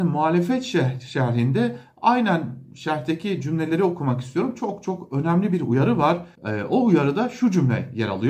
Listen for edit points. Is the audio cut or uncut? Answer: cut